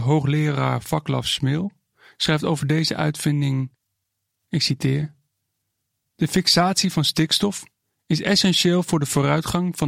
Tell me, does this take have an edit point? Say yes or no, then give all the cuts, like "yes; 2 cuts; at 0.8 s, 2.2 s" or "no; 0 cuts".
no; 0 cuts